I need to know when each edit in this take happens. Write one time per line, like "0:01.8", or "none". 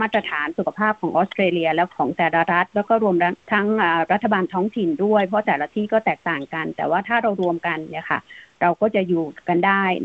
0:03.4